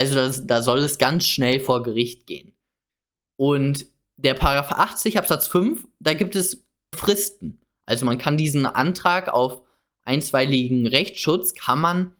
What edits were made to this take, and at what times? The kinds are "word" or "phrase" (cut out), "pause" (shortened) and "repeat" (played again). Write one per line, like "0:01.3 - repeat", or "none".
0:06.9 - phrase

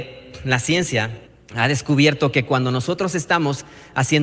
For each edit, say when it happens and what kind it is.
0:01.3 - pause

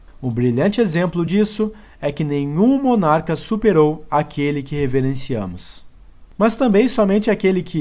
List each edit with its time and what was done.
none

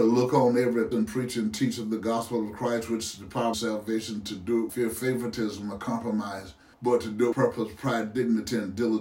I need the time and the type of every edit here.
0:00.9 - word
0:03.5 - phrase
0:04.7 - word
0:06.7 - pause
0:07.3 - word

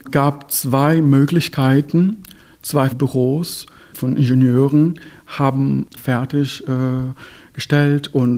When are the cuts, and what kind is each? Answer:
0:02.9 - word
0:03.9 - word
0:05.9 - word

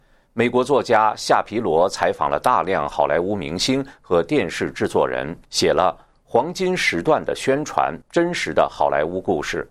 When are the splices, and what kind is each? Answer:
0:05.4 - pause
0:08.0 - pause

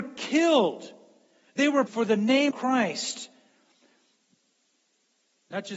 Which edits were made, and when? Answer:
0:01.9 - word
0:02.5 - word

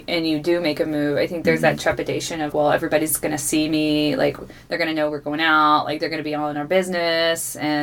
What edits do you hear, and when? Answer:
0:02.5 - word

